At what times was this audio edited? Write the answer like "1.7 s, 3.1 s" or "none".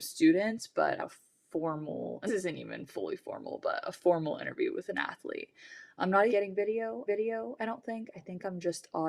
1.0 s, 2.3 s, 6.0 s, 6.3 s, 7.1 s